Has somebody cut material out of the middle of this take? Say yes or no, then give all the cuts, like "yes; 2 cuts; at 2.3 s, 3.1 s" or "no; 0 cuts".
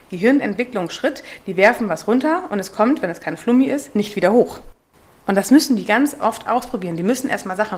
no; 0 cuts